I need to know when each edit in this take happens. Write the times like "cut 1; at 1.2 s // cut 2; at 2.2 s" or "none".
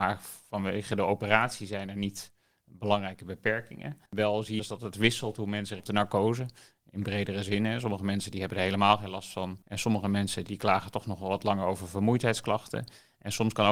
cut 1; at 4.0 s // cut 2; at 4.6 s // cut 3; at 5.8 s // cut 4; at 10.5 s